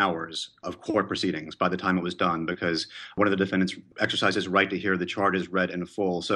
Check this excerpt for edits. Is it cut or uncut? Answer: uncut